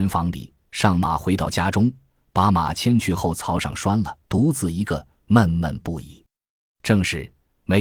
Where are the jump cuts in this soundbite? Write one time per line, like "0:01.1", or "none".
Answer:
0:04.2

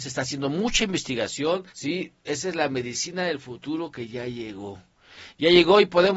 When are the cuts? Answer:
0:01.7

